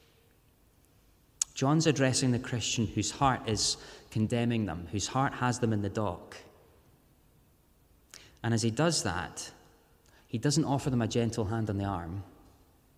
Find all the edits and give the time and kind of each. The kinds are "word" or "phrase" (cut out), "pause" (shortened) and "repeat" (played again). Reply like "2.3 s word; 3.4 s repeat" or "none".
none

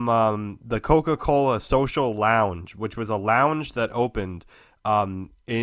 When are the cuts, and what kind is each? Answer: none

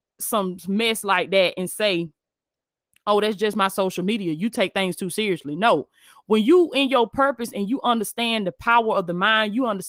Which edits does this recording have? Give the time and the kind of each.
none

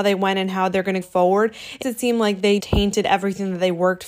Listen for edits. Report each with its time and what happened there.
1.0 s word; 1.8 s word; 2.6 s word

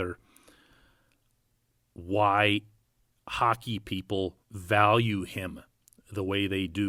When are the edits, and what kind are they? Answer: 4.4 s pause

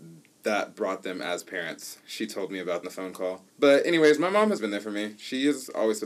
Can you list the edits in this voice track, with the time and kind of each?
2.8 s phrase; 3.5 s pause; 4.6 s word

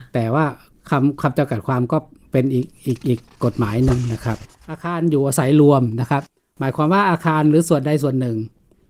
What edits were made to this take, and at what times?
none

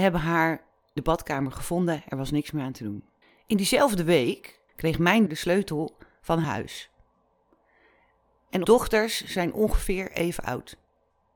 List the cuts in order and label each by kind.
1.0 s word; 3.2 s pause; 4.7 s pause; 5.3 s word; 6.4 s word; 8.6 s word

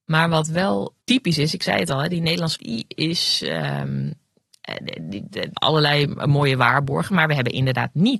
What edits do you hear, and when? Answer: 1.0 s pause; 2.6 s word; 5.5 s word

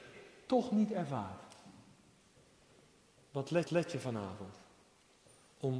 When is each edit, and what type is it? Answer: 3.6 s repeat

